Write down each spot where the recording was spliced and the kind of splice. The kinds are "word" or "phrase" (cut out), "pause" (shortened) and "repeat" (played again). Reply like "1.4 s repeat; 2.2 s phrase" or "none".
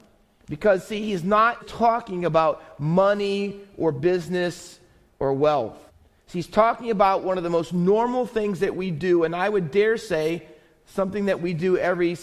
1.6 s word; 5.9 s pause